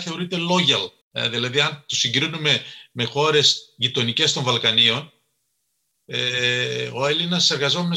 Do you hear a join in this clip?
yes; 1 cut; at 1.0 s

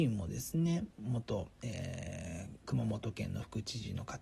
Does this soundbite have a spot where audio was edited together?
yes; 1 cut; at 0.9 s

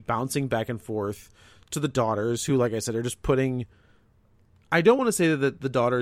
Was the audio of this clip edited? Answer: no; 0 cuts

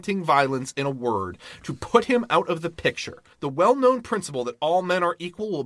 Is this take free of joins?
no; 1 cut; at 3.3 s

